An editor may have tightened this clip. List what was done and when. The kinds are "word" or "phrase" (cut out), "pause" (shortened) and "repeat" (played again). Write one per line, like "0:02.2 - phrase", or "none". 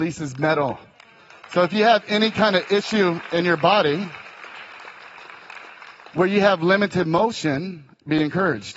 none